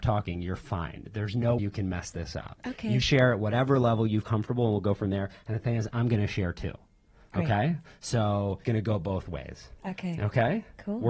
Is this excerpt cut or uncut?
cut